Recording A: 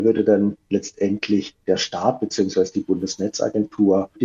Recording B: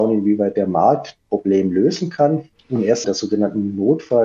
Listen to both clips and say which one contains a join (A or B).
B